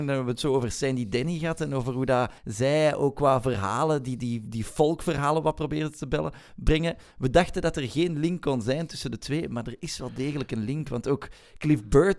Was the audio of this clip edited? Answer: yes; 1 cut; at 2.4 s

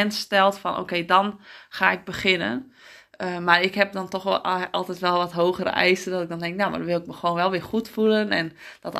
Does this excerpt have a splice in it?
no; 0 cuts

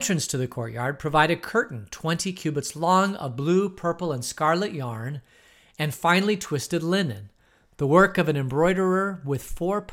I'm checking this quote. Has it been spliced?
no; 0 cuts

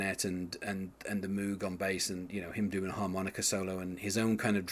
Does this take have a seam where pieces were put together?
no; 0 cuts

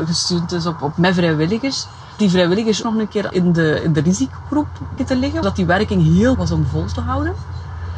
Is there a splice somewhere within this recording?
yes; 7 cuts; at 0.9 s, 2.2 s, 2.8 s, 3.3 s, 5.0 s, 5.4 s, 6.3 s

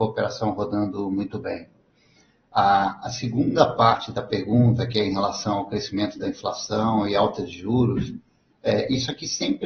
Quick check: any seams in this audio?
no; 0 cuts

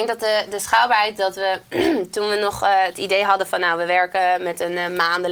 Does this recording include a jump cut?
no; 0 cuts

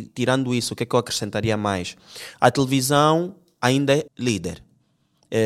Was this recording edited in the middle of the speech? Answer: yes; 1 cut; at 4.1 s

